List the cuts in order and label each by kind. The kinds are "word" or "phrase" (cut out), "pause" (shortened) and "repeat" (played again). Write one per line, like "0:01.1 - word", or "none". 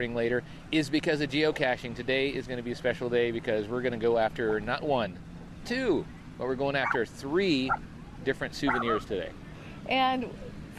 0:05.6 - word
0:08.2 - word